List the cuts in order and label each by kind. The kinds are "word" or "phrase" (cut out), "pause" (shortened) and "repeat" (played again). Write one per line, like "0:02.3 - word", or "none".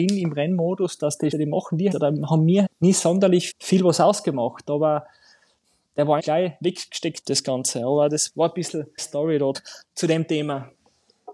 0:01.3 - word
0:01.9 - word
0:02.6 - word
0:03.5 - word
0:06.2 - word
0:07.2 - word
0:08.3 - word
0:09.0 - word
0:09.5 - word

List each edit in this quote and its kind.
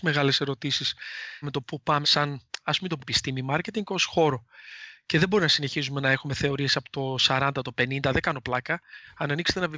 0:01.4 - word
0:02.0 - word
0:03.0 - word

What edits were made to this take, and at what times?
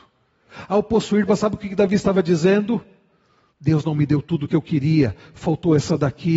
0:01.3 - word

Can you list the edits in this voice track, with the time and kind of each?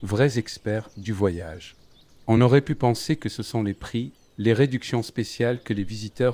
none

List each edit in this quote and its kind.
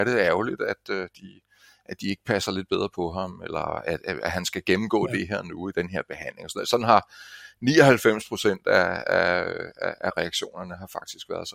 none

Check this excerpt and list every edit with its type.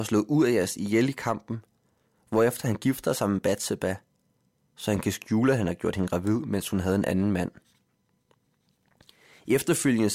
none

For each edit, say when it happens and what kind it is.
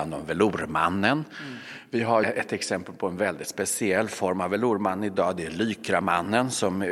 0:02.2 - word

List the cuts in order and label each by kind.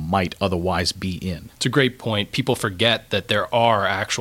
none

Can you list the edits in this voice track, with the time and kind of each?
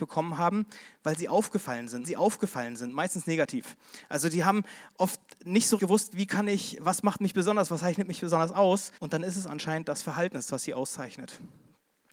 0:02.0 - repeat
0:05.8 - word
0:09.0 - pause

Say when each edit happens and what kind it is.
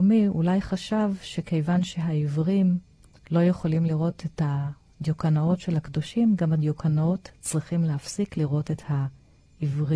none

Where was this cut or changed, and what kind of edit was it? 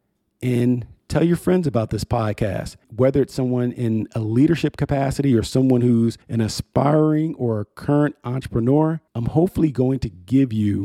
0:02.8 - pause
0:06.2 - pause
0:09.1 - pause

